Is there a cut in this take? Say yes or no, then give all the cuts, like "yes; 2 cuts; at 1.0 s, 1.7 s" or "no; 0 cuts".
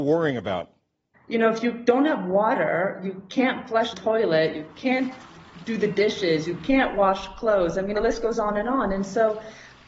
yes; 1 cut; at 3.9 s